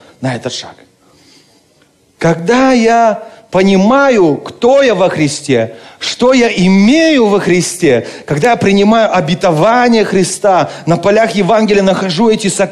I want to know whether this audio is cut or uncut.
uncut